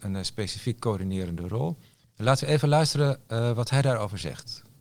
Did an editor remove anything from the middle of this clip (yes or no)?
no